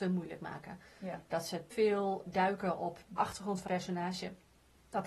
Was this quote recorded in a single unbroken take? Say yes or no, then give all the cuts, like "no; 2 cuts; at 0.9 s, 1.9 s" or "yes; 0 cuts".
no; 4 cuts; at 1.7 s, 2.2 s, 3.2 s, 3.7 s